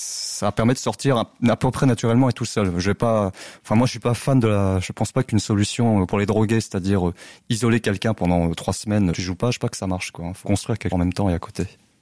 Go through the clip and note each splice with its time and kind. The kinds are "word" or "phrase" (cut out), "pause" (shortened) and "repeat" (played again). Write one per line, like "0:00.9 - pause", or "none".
0:06.1 - word
0:09.1 - word
0:09.6 - word
0:10.4 - word
0:10.9 - word